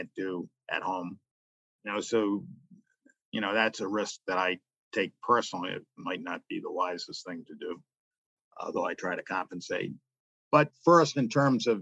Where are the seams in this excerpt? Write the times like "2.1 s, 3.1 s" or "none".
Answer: none